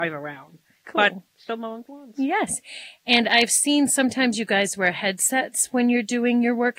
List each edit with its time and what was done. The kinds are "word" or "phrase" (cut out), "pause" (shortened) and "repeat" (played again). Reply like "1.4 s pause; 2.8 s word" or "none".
1.3 s pause; 1.8 s word